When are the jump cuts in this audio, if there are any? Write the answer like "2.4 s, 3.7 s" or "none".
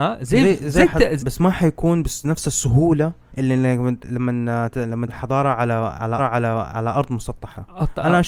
1.2 s, 3.3 s, 4.7 s, 5.1 s, 6.2 s